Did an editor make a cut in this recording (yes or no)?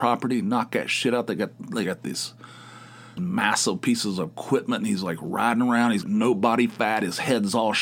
yes